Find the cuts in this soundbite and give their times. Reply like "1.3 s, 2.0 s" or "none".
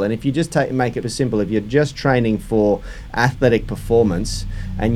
1.0 s

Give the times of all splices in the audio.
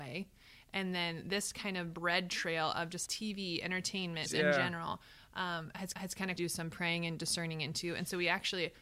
3.1 s, 4.3 s, 5.9 s, 6.4 s

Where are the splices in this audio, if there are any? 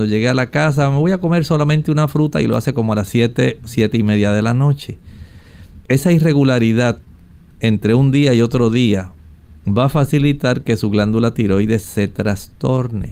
none

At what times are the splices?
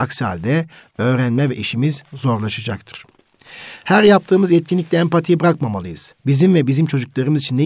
6.2 s

